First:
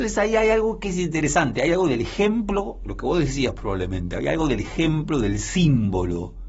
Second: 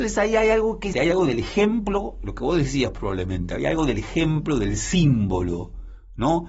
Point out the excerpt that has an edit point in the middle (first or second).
second